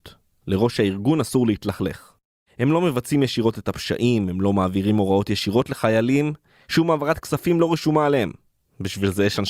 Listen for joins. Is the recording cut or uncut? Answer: uncut